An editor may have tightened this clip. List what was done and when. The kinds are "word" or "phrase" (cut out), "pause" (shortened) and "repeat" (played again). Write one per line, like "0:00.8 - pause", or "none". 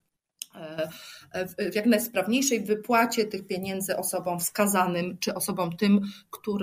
none